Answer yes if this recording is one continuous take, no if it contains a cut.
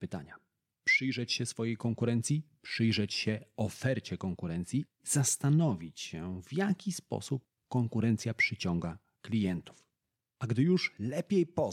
yes